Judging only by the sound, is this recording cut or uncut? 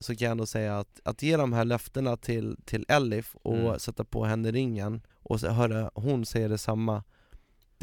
cut